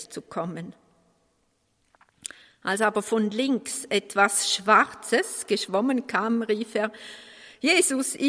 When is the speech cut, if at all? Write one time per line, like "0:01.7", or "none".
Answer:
none